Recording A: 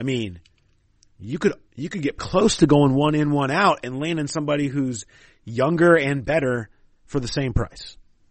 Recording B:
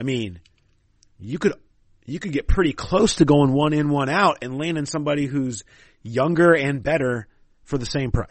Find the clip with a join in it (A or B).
A